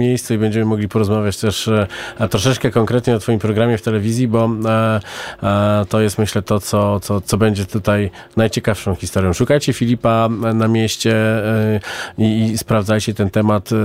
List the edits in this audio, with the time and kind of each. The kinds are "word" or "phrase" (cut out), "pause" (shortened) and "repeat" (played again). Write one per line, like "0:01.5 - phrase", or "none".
0:07.2 - word